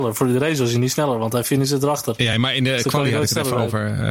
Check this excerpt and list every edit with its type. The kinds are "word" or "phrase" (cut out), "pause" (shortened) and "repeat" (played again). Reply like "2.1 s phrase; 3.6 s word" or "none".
none

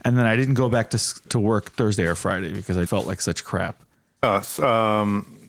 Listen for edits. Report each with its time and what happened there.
1.3 s word; 2.9 s word; 3.9 s pause

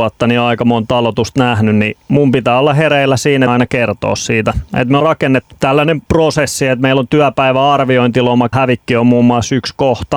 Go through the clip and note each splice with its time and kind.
3.5 s phrase; 5.0 s word; 5.5 s word; 6.1 s pause; 8.5 s word

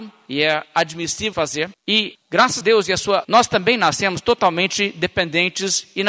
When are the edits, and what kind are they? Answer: 1.3 s word; 1.8 s pause; 2.6 s word; 3.2 s word

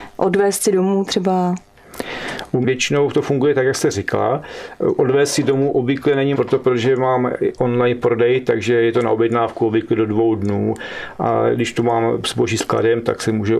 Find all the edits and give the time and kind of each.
2.6 s word; 6.3 s word; 7.6 s word

